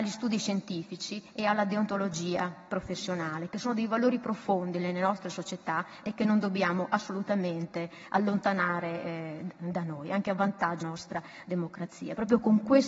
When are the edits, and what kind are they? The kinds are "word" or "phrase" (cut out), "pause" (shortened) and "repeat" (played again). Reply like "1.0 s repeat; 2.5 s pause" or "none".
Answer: 10.8 s word